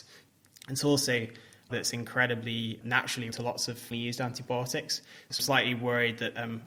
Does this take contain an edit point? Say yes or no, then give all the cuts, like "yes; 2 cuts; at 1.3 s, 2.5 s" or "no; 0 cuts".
yes; 4 cuts; at 1.7 s, 3.3 s, 3.9 s, 5.4 s